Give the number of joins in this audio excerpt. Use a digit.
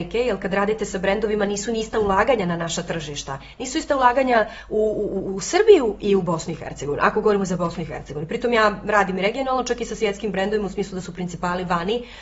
0